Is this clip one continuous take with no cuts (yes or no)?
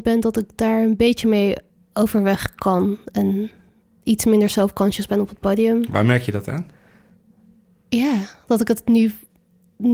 yes